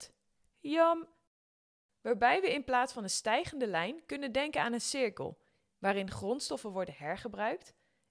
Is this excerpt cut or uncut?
uncut